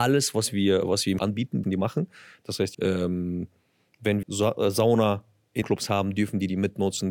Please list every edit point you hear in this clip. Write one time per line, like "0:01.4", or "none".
0:01.2
0:01.6
0:02.7
0:04.2
0:05.6